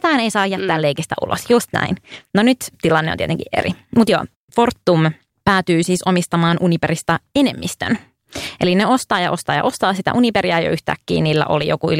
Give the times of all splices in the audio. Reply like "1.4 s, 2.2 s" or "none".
none